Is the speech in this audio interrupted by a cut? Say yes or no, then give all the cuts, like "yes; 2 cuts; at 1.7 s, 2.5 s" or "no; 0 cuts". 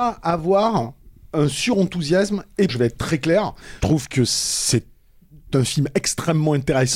yes; 2 cuts; at 2.7 s, 3.8 s